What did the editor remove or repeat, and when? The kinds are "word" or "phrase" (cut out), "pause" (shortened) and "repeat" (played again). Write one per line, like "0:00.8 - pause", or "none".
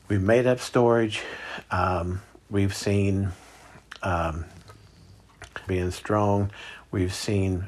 0:05.7 - phrase

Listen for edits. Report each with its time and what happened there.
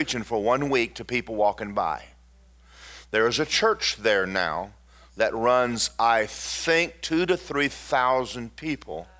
none

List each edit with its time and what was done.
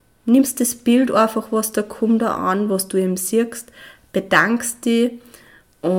none

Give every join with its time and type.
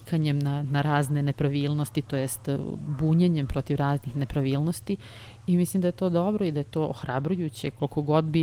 none

